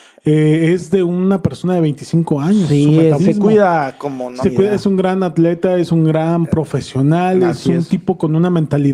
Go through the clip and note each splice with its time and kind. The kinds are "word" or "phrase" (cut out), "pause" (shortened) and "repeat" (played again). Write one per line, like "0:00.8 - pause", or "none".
0:03.2 - word
0:04.4 - word